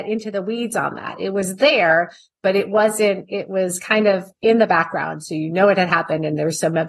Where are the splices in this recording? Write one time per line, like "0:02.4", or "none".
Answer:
none